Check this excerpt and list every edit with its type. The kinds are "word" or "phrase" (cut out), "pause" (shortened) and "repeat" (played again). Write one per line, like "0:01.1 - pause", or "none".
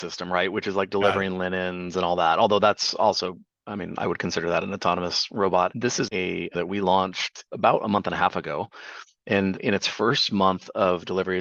0:06.1 - word